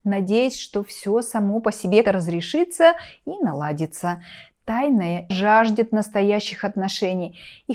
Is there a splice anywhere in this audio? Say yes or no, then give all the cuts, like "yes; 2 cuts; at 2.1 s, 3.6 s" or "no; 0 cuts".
yes; 2 cuts; at 2.0 s, 5.3 s